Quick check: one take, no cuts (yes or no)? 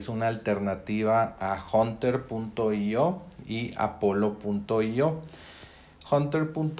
yes